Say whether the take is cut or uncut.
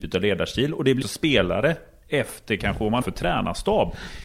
cut